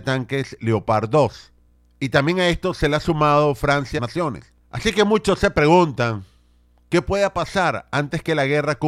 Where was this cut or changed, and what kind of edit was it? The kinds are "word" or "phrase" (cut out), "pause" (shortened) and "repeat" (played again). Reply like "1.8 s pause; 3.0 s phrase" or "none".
4.0 s phrase; 4.6 s pause